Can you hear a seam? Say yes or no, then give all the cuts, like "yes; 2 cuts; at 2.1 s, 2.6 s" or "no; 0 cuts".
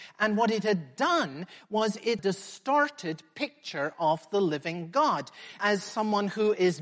yes; 1 cut; at 2.2 s